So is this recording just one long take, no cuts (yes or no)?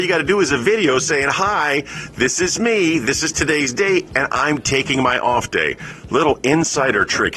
yes